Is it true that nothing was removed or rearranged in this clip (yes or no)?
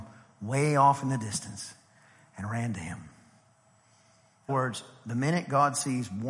no